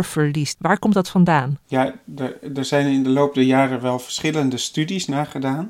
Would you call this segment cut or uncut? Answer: cut